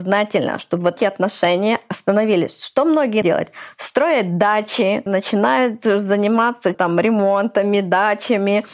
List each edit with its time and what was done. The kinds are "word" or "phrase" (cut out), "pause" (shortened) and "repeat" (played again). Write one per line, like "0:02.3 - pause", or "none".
0:01.0 - word
0:03.2 - word
0:05.1 - word
0:06.7 - word